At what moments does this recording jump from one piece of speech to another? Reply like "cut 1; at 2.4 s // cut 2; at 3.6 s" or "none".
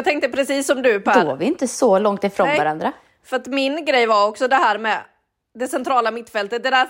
none